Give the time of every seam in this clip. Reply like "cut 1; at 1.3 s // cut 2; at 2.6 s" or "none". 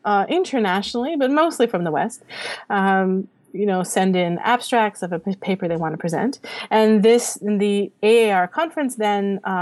none